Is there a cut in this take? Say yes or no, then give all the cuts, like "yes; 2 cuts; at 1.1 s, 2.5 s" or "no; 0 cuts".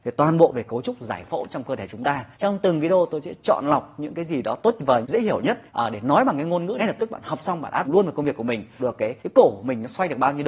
yes; 7 cuts; at 2.3 s, 5.0 s, 5.7 s, 6.8 s, 7.8 s, 8.8 s, 9.2 s